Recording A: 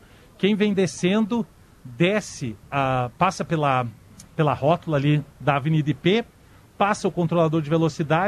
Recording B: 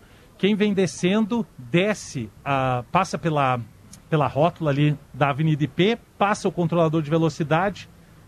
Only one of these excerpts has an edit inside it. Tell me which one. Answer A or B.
B